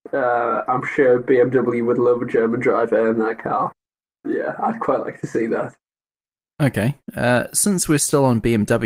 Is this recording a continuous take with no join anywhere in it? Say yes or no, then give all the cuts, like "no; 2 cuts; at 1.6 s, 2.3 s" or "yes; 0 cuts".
yes; 0 cuts